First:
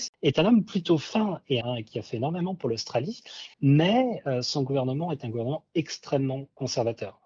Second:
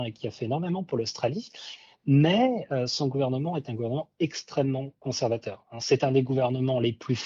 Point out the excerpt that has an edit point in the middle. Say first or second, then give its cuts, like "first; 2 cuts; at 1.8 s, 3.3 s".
first; 2 cuts; at 1.6 s, 3.5 s